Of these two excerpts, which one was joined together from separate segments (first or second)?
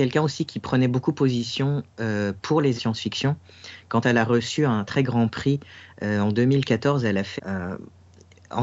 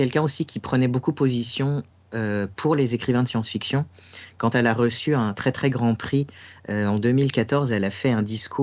first